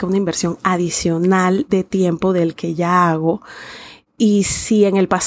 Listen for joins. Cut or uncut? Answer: uncut